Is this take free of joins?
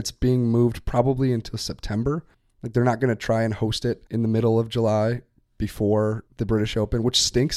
no; 3 cuts; at 2.3 s, 4.1 s, 6.3 s

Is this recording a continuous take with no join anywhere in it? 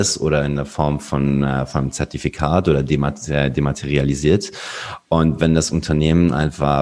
yes; 0 cuts

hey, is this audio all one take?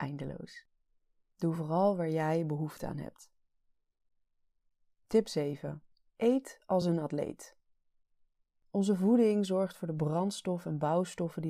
yes; 0 cuts

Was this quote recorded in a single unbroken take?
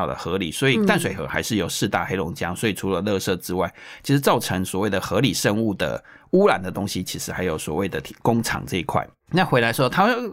yes; 0 cuts

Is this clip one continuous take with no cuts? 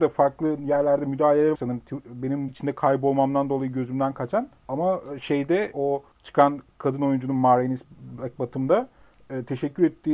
no; 4 cuts; at 1.5 s, 2.5 s, 4.6 s, 5.7 s

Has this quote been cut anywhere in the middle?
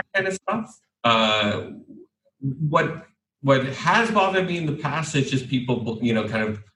no; 0 cuts

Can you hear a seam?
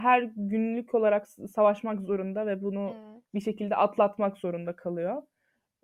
no; 0 cuts

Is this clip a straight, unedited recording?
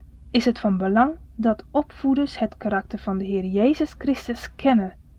no; 1 cut; at 1.2 s

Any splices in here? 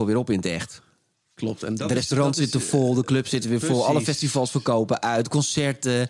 no; 0 cuts

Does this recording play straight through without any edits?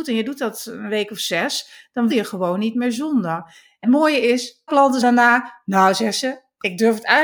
no; 4 cuts; at 2.1 s, 3.8 s, 4.7 s, 5.0 s

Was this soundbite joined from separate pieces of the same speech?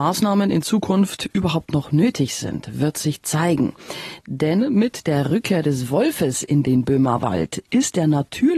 no; 0 cuts

